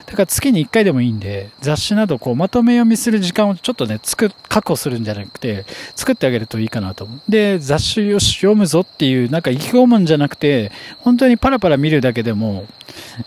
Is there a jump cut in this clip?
yes; 1 cut; at 4.4 s

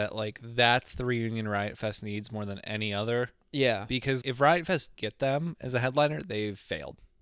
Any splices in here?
yes; 2 cuts; at 4.2 s, 5.0 s

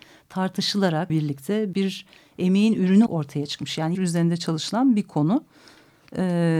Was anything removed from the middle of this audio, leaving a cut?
yes; 4 cuts; at 1.1 s, 1.7 s, 3.1 s, 3.9 s

